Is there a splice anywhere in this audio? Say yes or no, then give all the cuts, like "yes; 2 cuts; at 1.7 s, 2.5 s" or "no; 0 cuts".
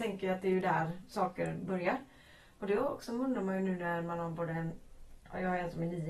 no; 0 cuts